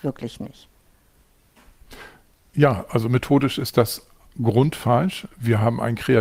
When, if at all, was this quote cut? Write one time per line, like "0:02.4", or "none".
none